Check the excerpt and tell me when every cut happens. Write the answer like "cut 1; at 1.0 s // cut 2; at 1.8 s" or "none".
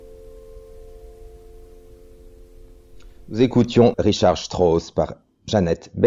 cut 1; at 3.9 s